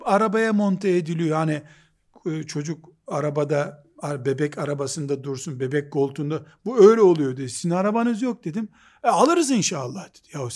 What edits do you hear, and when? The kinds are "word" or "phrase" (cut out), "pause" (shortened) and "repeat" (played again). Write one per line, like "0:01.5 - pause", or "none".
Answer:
none